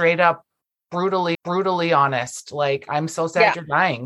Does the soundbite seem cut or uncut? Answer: cut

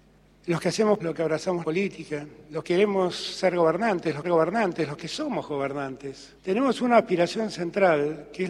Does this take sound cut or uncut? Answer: cut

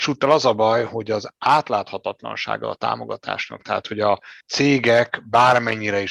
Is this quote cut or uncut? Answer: cut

